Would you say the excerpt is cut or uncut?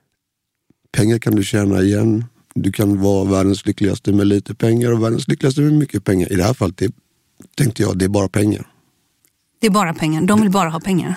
uncut